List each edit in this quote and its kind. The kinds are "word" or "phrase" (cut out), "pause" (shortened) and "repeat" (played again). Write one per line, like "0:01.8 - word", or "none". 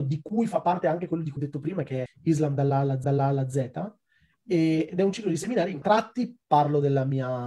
0:01.4 - word
0:02.1 - word
0:03.0 - repeat
0:05.8 - phrase
0:06.4 - pause